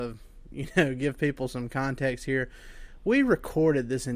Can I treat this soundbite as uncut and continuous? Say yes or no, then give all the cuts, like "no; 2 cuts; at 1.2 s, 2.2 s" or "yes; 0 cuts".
yes; 0 cuts